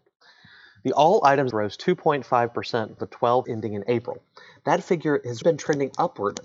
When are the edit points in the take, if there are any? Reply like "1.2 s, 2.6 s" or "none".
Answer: 1.5 s, 3.0 s, 3.4 s, 5.4 s